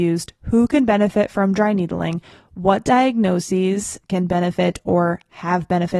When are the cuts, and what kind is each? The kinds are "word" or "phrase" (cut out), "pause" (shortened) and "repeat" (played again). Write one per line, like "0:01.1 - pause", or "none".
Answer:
none